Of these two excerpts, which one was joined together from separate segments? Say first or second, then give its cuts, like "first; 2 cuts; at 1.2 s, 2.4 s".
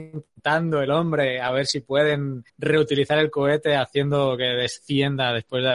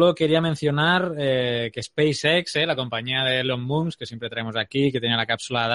first; 1 cut; at 2.5 s